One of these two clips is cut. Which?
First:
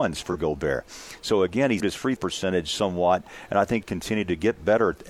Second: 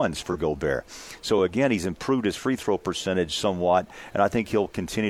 first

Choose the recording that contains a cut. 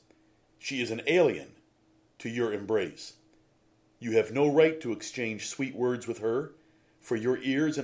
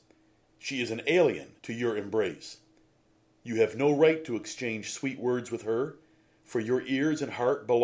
second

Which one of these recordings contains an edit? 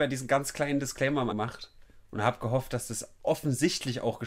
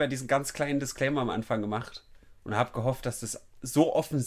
first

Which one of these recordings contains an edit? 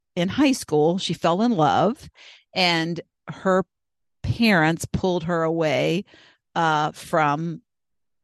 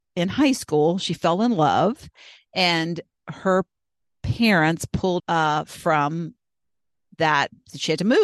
second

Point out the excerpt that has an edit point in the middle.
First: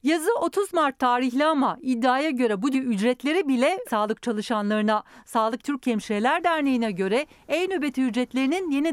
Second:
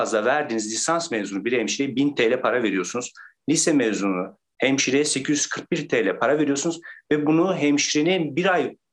first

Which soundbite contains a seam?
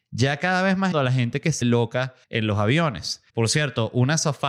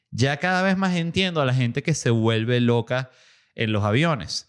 first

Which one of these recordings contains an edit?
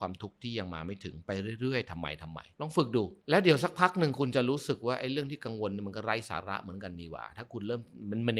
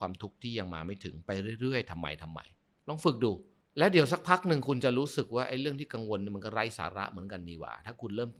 first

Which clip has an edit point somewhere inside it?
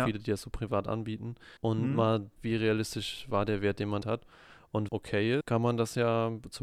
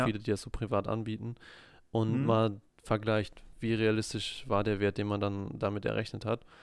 first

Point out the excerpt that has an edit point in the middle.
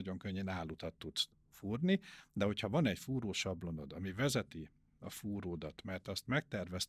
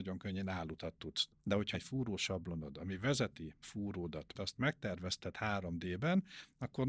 second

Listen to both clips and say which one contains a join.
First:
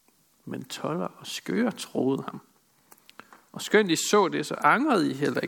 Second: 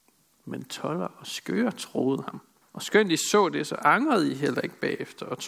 second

